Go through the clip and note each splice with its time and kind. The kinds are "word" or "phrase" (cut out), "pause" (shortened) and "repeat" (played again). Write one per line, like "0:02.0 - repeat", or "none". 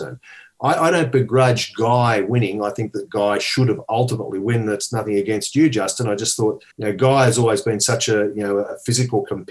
0:06.7 - pause